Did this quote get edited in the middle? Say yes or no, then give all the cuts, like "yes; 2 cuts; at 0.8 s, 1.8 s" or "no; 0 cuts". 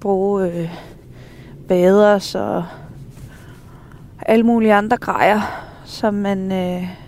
no; 0 cuts